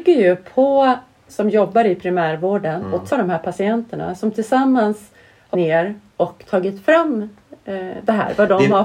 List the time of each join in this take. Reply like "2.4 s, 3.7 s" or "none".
1.3 s, 3.1 s, 5.5 s